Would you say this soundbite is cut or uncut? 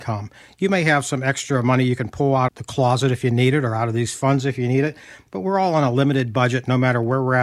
cut